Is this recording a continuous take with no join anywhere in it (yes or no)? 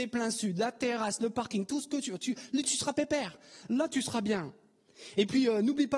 yes